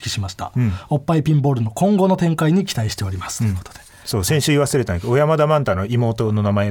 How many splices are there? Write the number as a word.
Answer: zero